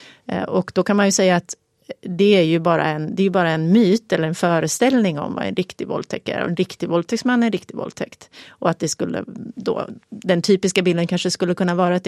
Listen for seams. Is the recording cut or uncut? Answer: cut